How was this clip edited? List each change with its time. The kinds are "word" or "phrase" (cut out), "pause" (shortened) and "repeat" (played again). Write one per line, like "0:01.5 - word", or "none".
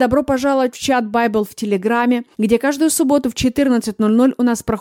0:02.3 - pause